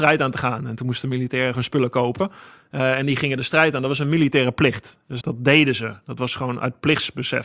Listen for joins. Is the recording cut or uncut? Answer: cut